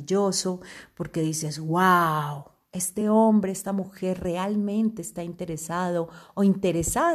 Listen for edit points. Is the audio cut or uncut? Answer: uncut